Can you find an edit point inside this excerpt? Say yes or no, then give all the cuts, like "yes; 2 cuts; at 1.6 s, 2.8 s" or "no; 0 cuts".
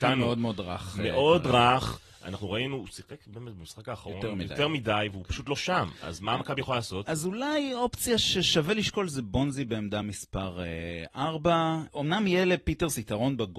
no; 0 cuts